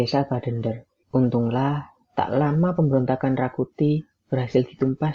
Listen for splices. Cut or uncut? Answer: uncut